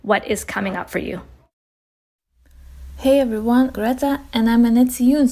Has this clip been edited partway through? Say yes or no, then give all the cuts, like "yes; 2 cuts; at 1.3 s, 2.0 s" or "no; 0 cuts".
yes; 1 cut; at 3.7 s